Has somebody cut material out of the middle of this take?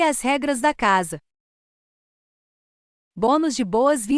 no; 0 cuts

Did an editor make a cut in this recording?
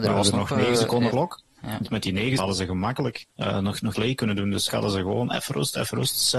yes; 5 cuts; at 1.1 s, 2.4 s, 3.3 s, 3.9 s, 4.7 s

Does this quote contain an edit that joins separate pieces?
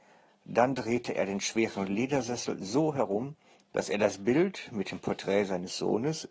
yes; 1 cut; at 3.5 s

